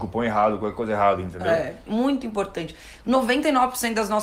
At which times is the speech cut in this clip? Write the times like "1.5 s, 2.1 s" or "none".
1.9 s